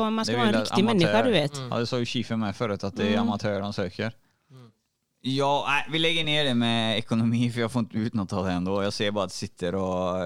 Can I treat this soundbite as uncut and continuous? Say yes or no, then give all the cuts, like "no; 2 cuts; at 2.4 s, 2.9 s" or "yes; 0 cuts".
yes; 0 cuts